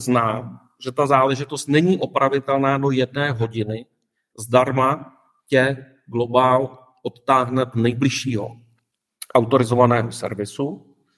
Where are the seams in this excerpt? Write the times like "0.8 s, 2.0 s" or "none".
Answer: none